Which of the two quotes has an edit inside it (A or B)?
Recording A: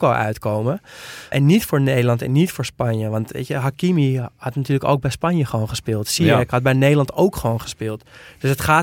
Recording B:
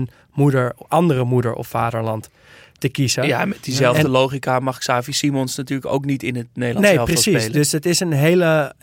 A